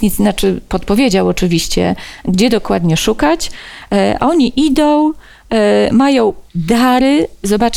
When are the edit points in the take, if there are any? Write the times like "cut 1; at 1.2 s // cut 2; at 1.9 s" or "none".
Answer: cut 1; at 6.5 s